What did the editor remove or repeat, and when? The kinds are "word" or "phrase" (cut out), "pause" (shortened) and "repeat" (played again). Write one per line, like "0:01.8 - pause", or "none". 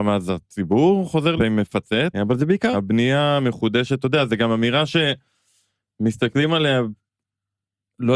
0:01.4 - phrase
0:02.1 - word
0:02.7 - word